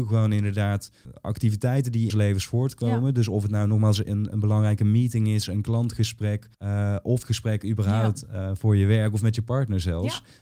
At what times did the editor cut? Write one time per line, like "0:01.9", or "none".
0:02.1
0:06.5
0:07.2